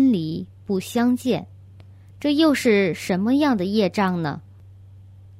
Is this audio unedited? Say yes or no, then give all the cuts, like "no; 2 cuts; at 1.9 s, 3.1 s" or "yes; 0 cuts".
yes; 0 cuts